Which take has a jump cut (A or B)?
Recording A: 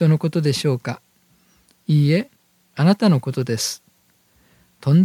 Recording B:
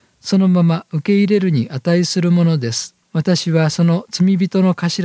B